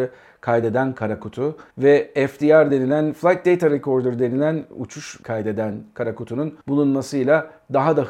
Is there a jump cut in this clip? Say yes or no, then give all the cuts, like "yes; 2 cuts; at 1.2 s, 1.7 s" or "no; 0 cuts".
yes; 3 cuts; at 1.7 s, 5.2 s, 6.6 s